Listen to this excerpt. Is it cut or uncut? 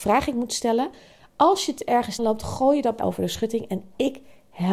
cut